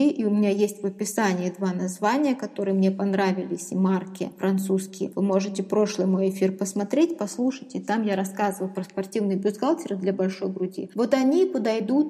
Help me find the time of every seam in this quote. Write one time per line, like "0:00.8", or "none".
none